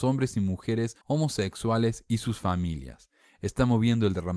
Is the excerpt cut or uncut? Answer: cut